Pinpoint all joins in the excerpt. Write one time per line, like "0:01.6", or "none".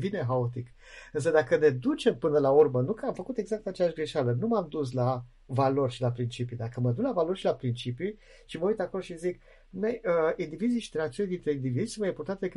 none